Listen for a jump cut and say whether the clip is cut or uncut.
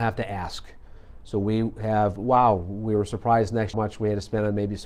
cut